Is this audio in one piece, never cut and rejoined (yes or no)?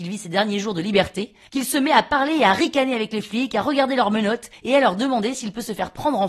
yes